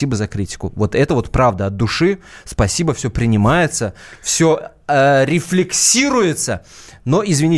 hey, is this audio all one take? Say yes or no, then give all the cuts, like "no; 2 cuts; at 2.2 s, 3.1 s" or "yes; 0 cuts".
yes; 0 cuts